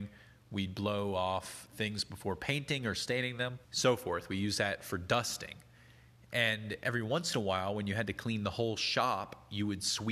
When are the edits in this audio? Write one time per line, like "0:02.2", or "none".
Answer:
0:03.6

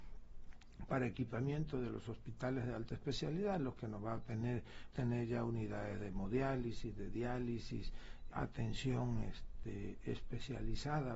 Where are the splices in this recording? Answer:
0:04.9
0:08.3

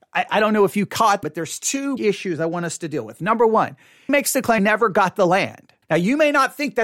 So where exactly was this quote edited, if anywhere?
0:01.2
0:02.0
0:04.1
0:04.6
0:05.8

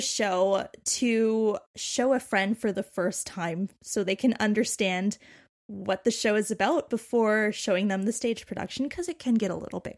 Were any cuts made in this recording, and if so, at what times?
0:01.7

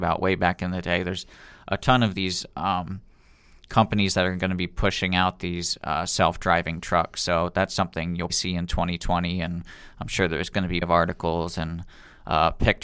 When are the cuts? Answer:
0:08.3
0:10.8

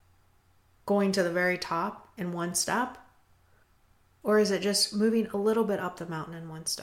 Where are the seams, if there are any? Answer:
0:03.6

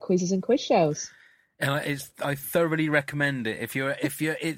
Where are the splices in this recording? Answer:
none

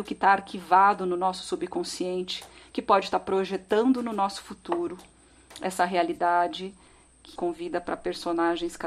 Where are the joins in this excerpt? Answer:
0:07.4

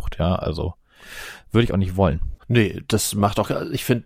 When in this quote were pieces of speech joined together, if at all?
0:02.4

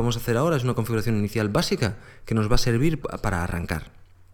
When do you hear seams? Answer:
0:03.0

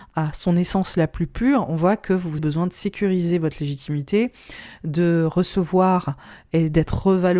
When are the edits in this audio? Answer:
0:02.4

